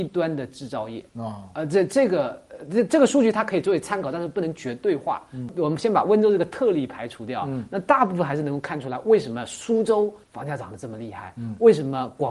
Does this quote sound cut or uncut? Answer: cut